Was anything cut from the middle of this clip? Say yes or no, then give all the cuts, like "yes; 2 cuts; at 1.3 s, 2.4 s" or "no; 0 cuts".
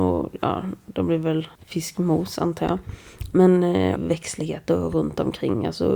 yes; 2 cuts; at 1.5 s, 4.0 s